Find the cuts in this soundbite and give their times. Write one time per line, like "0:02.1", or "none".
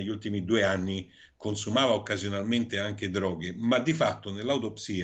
none